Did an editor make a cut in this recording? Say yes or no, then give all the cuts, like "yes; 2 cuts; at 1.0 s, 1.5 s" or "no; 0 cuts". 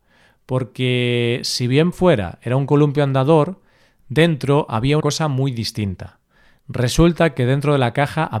yes; 2 cuts; at 1.9 s, 5.0 s